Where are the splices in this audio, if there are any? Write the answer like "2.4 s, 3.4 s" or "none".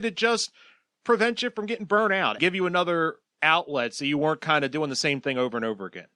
2.4 s